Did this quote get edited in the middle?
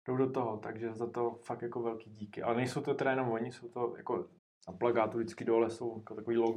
yes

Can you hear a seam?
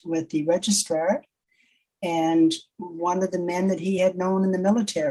no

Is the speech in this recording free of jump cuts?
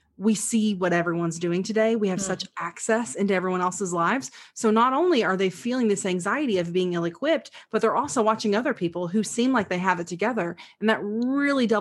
yes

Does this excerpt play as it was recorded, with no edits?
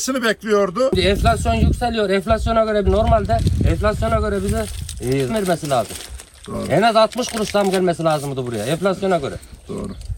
no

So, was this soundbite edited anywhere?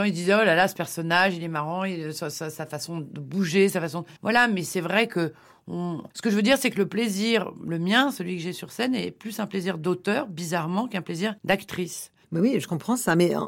yes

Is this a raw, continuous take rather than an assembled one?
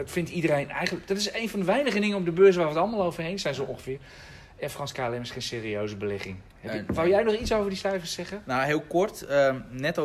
yes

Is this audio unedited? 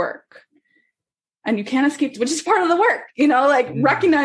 no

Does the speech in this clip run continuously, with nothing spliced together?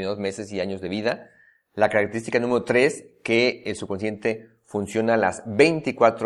yes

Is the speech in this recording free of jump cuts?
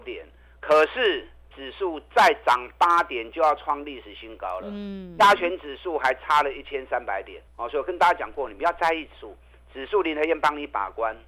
no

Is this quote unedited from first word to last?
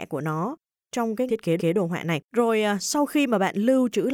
no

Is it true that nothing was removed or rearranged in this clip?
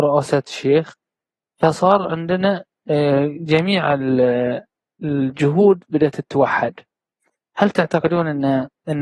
yes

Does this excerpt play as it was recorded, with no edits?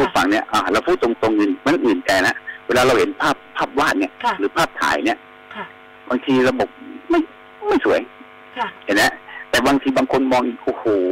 yes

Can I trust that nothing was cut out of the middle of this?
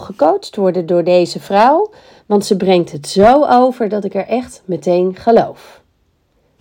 yes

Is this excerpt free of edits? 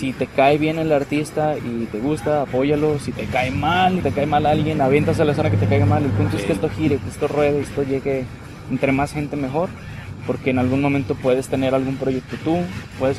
no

